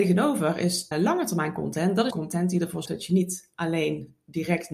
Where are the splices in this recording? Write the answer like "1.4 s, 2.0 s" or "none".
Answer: 0.9 s, 2.1 s, 2.9 s